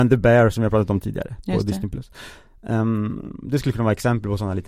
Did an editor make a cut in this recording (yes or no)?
no